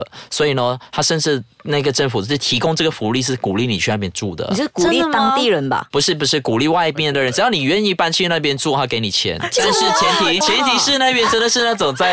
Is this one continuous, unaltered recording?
no; 1 cut; at 10.4 s

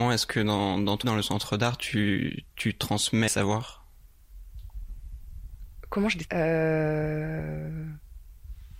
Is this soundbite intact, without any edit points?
no; 3 cuts; at 1.0 s, 3.3 s, 6.3 s

